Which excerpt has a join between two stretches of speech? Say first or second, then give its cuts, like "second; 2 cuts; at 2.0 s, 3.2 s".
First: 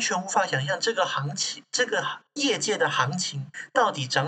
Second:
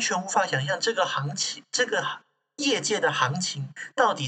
first; 1 cut; at 2.3 s